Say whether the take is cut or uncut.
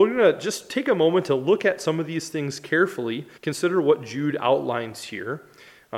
cut